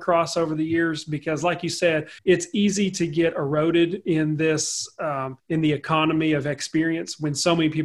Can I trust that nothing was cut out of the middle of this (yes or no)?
no